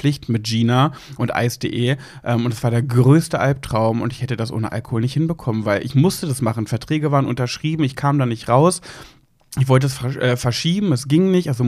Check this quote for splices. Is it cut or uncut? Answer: uncut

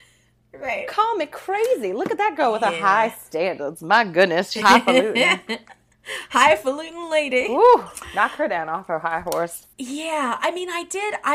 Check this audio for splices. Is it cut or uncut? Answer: cut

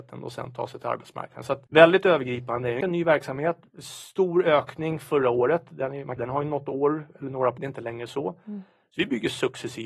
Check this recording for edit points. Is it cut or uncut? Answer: cut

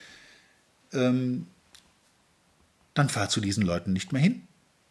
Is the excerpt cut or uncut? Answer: uncut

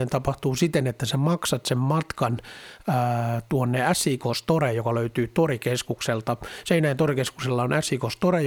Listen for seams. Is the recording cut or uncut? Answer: uncut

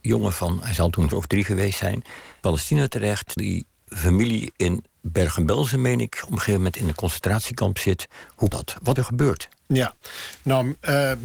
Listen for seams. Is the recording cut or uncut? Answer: cut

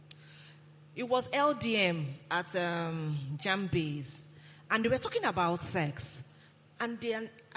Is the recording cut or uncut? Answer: uncut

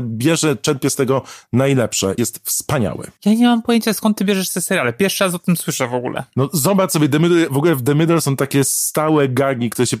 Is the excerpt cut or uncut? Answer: uncut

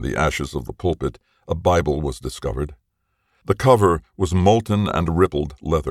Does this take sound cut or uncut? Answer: uncut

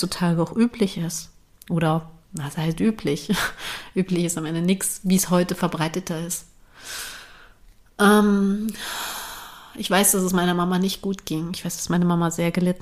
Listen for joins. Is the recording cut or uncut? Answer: uncut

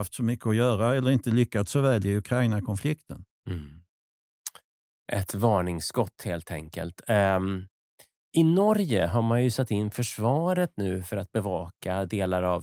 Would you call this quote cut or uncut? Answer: uncut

